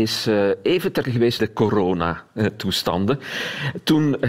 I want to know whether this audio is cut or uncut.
cut